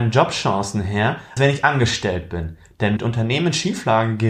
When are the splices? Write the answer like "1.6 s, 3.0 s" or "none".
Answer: 1.4 s, 3.0 s